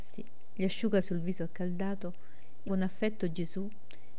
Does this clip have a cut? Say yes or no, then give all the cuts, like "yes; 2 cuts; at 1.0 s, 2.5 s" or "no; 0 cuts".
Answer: yes; 2 cuts; at 1.0 s, 2.7 s